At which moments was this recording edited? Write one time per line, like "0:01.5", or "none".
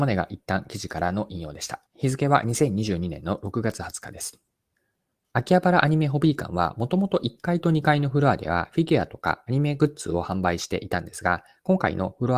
0:01.9
0:04.6